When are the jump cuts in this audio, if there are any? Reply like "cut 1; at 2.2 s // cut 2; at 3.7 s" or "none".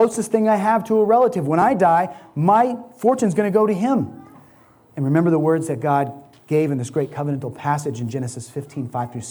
none